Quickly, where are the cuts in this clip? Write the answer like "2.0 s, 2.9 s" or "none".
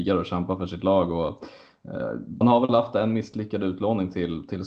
2.4 s